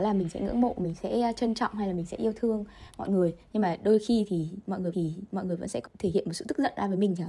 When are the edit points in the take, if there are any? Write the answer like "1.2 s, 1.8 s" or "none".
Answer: 4.9 s, 5.9 s